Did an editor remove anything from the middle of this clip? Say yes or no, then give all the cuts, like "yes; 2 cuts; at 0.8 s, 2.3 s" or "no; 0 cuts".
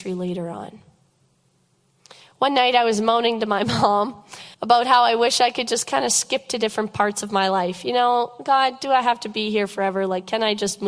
yes; 1 cut; at 4.5 s